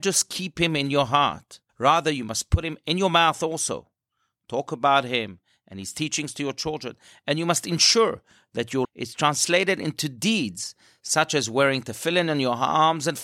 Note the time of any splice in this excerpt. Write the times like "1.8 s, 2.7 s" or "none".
1.7 s, 8.8 s